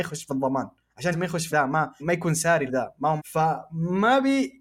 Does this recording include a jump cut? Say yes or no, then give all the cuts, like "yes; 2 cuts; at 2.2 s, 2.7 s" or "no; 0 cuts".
yes; 5 cuts; at 1.1 s, 1.5 s, 2.0 s, 2.7 s, 3.2 s